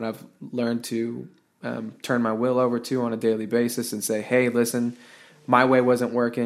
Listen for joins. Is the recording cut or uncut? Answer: uncut